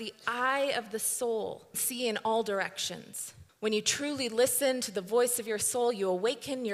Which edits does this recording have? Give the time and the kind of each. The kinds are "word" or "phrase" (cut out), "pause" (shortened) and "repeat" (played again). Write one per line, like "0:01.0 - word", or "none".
0:01.7 - word
0:03.5 - pause